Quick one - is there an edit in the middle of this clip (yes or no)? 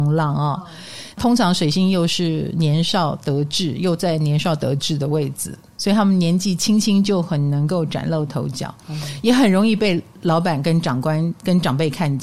no